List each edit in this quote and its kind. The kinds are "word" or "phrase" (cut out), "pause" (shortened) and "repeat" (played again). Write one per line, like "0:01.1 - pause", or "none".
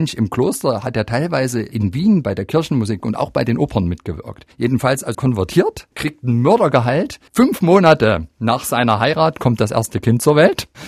0:04.5 - pause
0:05.1 - word
0:05.9 - pause
0:07.3 - pause